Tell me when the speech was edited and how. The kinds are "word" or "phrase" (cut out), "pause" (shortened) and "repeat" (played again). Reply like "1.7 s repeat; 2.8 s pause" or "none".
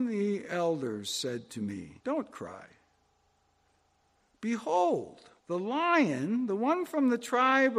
2.0 s pause; 5.4 s pause